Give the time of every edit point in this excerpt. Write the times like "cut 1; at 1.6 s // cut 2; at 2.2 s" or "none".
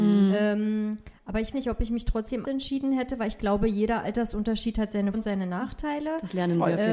cut 1; at 1.5 s // cut 2; at 2.4 s // cut 3; at 5.1 s